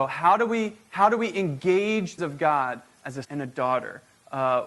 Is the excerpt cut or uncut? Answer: cut